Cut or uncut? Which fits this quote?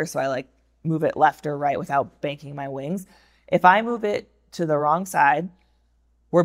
uncut